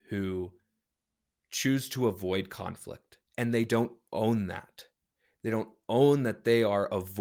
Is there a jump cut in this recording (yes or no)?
yes